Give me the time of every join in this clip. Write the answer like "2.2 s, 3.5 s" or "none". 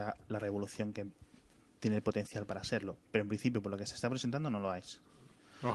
none